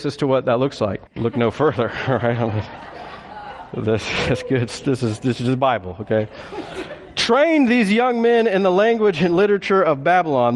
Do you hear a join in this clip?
yes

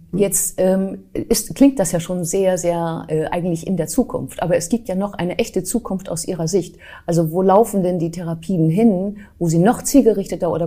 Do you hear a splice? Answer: no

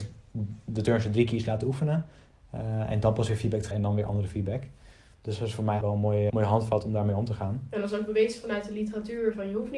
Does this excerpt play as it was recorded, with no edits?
no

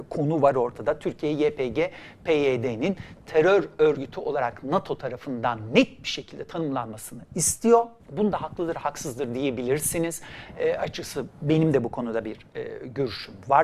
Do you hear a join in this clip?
yes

